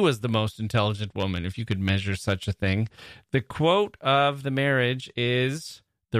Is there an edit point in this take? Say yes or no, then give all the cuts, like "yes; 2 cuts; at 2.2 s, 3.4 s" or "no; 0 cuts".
no; 0 cuts